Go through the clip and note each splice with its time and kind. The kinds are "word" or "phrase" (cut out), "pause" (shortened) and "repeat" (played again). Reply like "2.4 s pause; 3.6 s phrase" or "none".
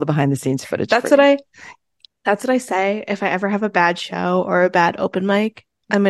none